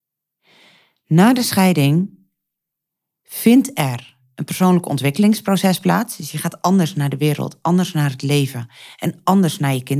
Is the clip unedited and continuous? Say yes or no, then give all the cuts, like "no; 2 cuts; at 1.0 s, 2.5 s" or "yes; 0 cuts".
yes; 0 cuts